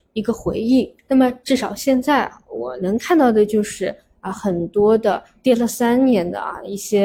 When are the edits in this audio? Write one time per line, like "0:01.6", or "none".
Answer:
0:01.0